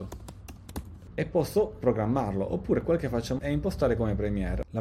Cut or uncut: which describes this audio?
cut